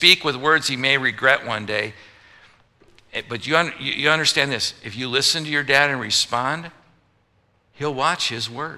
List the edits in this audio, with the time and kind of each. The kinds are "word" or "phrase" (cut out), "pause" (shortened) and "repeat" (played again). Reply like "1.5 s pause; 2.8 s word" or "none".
none